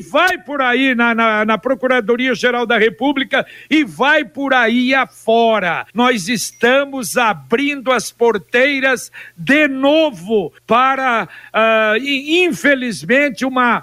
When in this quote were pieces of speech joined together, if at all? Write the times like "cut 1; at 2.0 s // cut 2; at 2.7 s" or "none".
cut 1; at 5.9 s // cut 2; at 10.6 s